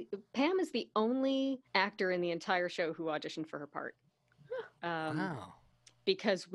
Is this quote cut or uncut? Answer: cut